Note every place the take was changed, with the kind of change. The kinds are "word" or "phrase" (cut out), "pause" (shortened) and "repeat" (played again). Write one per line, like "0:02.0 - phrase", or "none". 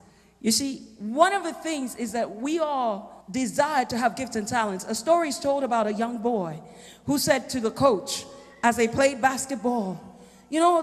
0:03.2 - pause